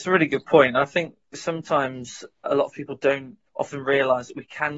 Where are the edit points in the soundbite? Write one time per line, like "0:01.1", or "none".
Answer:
0:03.5